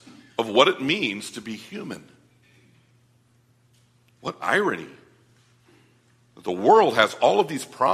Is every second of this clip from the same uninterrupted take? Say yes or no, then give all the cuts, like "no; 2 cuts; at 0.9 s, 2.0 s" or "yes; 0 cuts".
yes; 0 cuts